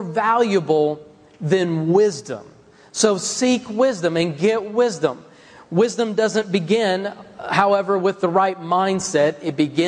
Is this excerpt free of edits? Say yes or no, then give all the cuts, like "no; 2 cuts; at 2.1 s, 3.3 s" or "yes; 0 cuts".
yes; 0 cuts